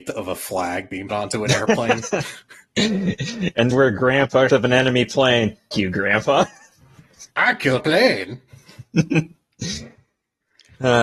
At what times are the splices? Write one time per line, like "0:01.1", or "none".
0:01.1
0:03.7
0:04.5
0:05.7
0:07.3
0:07.8